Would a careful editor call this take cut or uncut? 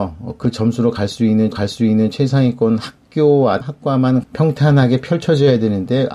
cut